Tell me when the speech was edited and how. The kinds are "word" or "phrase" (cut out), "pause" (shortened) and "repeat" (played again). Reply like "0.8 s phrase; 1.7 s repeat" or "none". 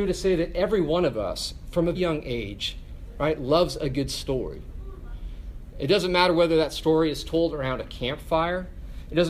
1.9 s word